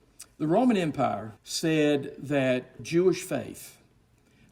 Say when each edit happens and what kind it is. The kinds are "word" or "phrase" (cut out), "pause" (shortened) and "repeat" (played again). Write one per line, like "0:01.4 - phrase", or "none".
0:01.4 - pause
0:02.8 - word